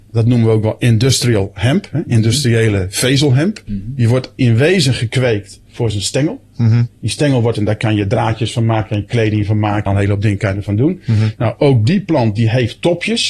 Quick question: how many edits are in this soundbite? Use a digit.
3